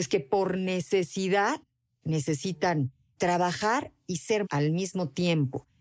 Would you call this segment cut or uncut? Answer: cut